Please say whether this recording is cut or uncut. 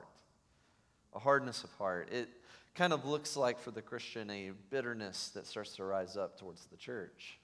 uncut